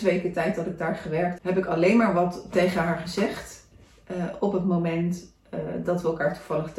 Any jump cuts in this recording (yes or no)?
yes